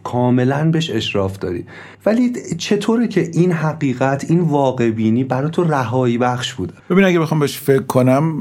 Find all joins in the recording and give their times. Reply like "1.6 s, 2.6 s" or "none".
1.9 s, 6.8 s

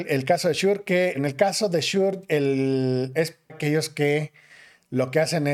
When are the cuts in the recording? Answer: 1.1 s, 3.5 s

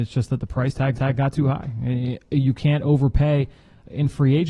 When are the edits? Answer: 0.9 s

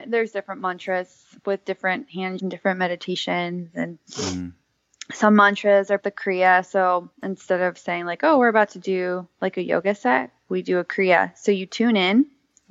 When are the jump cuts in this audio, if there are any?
2.4 s, 6.0 s, 7.1 s

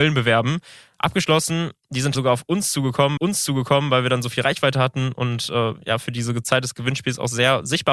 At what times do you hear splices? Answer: 2.1 s, 3.2 s

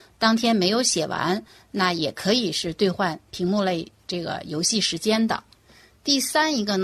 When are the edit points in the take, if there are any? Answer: none

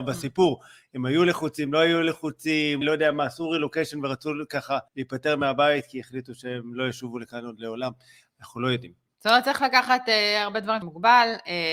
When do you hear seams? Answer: 2.8 s, 4.9 s, 10.8 s

